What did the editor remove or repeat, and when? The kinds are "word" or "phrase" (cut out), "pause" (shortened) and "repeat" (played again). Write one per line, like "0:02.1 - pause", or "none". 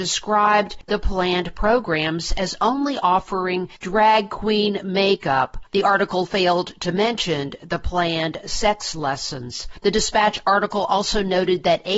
none